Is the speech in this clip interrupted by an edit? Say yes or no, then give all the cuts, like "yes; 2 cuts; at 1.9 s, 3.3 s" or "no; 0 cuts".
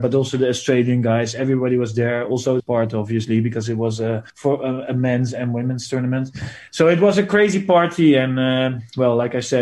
yes; 2 cuts; at 2.6 s, 4.3 s